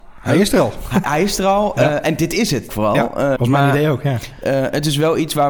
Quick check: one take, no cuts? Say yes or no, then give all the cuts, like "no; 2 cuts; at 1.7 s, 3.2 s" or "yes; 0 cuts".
no; 3 cuts; at 1.0 s, 2.7 s, 3.4 s